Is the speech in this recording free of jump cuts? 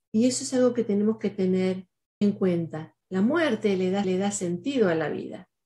no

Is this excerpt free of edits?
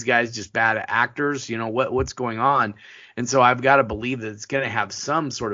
yes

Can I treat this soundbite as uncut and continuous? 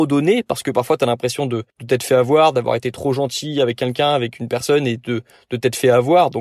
no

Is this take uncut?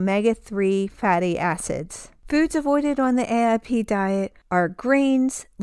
yes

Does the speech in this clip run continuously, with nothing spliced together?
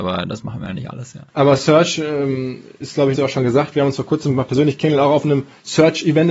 no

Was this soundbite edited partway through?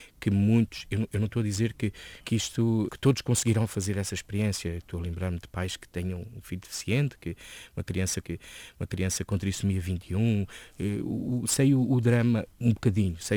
yes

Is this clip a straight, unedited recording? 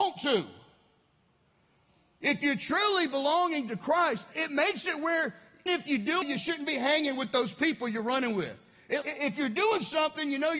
no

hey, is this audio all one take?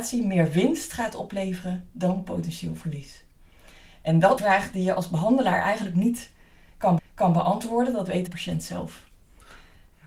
no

